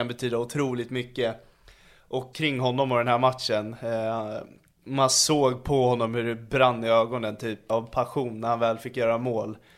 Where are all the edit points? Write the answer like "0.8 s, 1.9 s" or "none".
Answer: 2.3 s, 7.7 s